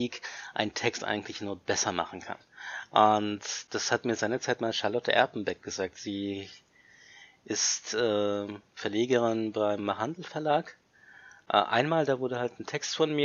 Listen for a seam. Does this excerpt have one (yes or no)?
no